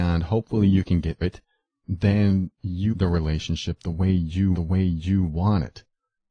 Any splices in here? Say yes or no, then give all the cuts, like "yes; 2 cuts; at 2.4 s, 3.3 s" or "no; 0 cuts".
yes; 3 cuts; at 1.2 s, 2.9 s, 4.5 s